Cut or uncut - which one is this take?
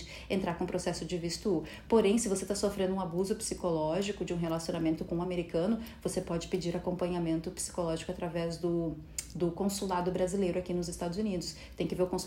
uncut